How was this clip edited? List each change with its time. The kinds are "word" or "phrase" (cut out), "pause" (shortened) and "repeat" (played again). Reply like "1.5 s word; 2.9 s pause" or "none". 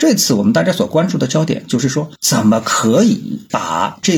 2.2 s pause